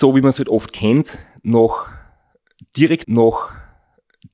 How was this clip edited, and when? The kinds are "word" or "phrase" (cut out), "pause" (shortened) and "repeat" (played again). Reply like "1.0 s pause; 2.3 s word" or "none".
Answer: 3.0 s repeat